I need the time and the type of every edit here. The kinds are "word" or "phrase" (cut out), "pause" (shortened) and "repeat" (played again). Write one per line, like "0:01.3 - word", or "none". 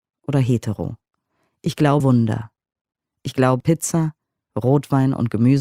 0:02.0 - word
0:03.6 - word